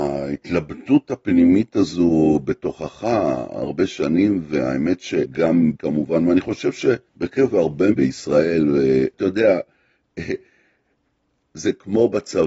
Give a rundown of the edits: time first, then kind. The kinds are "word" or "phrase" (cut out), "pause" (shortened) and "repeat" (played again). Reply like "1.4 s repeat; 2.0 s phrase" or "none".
5.7 s word; 7.1 s pause; 7.9 s phrase